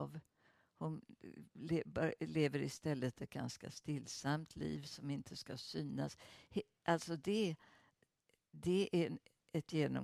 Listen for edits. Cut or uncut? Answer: uncut